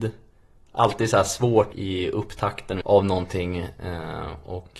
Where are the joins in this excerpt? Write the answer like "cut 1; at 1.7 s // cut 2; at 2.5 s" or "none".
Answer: cut 1; at 1.7 s // cut 2; at 2.8 s

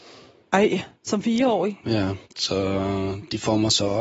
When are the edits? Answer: cut 1; at 1.0 s // cut 2; at 2.3 s

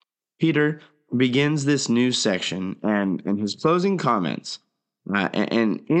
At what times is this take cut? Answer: none

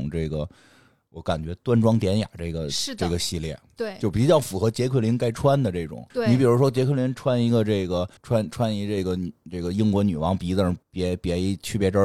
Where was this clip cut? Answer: cut 1; at 6.1 s // cut 2; at 8.2 s // cut 3; at 10.8 s

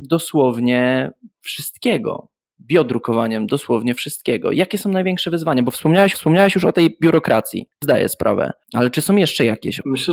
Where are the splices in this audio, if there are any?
cut 1; at 1.3 s // cut 2; at 6.1 s // cut 3; at 7.8 s // cut 4; at 8.6 s

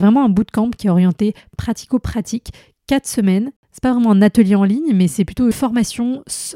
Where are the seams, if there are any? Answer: cut 1; at 5.5 s

